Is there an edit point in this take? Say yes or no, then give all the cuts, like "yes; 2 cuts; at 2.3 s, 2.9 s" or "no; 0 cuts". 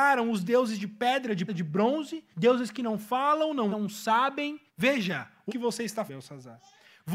yes; 6 cuts; at 1.5 s, 2.3 s, 3.7 s, 4.7 s, 5.5 s, 6.1 s